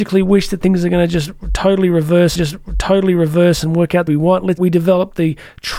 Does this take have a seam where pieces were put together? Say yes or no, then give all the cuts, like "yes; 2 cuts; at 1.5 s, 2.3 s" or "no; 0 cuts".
yes; 3 cuts; at 2.4 s, 4.1 s, 4.6 s